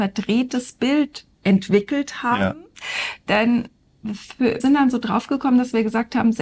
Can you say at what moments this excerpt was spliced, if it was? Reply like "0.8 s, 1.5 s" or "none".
1.3 s, 4.6 s